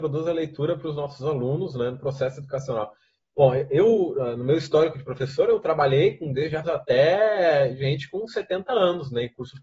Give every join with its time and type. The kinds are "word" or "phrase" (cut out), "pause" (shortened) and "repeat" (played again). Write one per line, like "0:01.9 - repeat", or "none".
0:06.6 - word